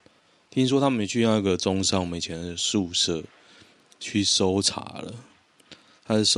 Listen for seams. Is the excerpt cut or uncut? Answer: uncut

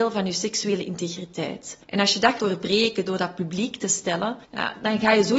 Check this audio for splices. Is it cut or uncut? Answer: cut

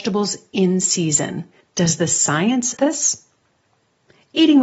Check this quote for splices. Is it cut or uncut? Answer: cut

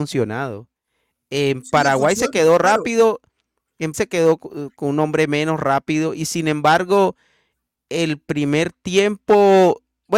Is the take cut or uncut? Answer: cut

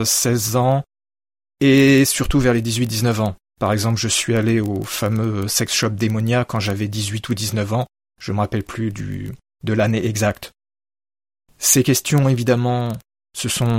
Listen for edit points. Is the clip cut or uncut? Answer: uncut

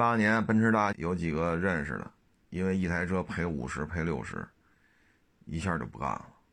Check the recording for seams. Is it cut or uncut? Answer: cut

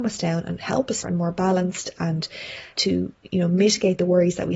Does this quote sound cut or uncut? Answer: cut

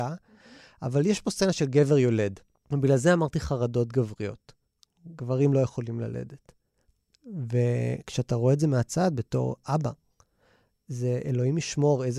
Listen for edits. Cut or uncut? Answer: uncut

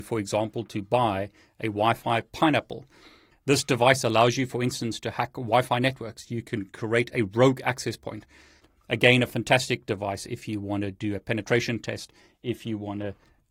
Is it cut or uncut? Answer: uncut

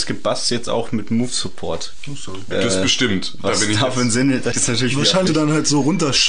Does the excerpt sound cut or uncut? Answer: cut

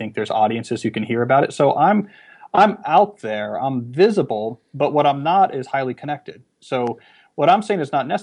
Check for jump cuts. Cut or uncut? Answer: uncut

